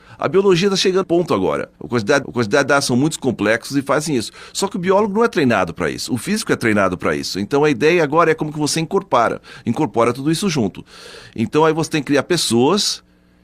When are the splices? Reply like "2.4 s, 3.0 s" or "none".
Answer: 1.0 s, 1.8 s, 2.2 s